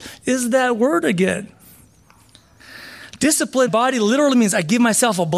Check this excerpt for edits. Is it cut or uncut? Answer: cut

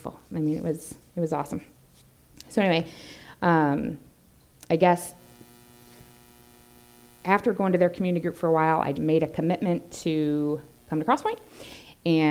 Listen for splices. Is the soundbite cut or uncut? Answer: cut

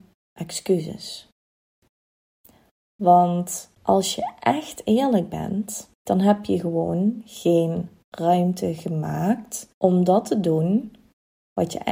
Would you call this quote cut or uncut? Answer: cut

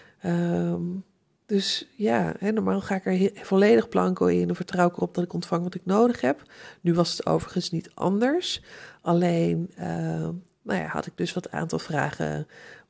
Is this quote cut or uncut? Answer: uncut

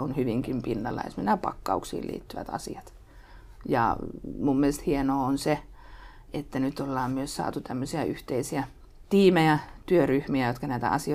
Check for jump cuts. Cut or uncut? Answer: uncut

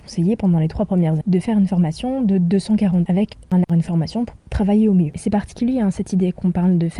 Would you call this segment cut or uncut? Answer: cut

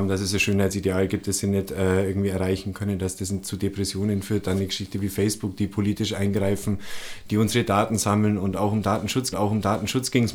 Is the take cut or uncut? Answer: cut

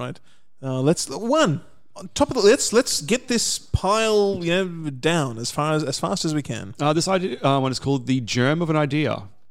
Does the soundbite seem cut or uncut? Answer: uncut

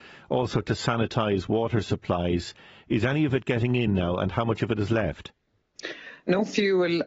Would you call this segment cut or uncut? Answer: uncut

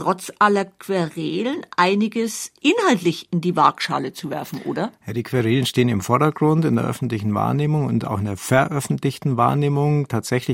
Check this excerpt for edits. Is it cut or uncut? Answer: uncut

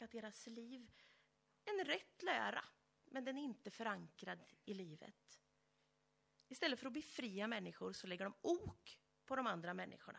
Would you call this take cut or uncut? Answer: uncut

